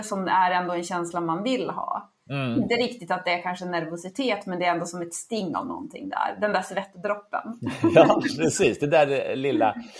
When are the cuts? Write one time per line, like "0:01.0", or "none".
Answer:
none